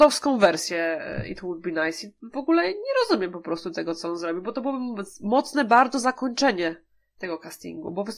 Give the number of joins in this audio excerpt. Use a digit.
0